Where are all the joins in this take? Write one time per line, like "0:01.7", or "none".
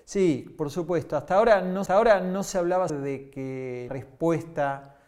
0:01.9
0:02.9
0:03.9